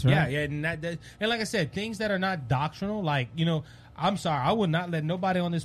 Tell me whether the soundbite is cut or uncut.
uncut